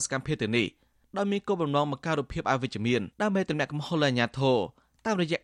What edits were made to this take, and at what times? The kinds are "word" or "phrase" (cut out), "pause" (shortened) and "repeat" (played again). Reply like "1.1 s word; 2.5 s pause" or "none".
3.1 s pause